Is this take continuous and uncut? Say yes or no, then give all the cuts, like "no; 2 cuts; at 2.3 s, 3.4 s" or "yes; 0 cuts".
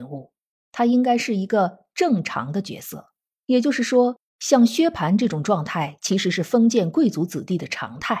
yes; 0 cuts